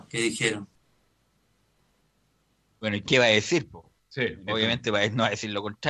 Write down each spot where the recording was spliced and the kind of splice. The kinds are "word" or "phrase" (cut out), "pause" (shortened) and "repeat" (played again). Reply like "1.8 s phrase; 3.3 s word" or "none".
none